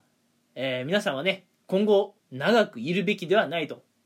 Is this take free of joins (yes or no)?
no